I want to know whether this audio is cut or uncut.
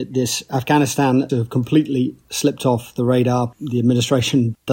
cut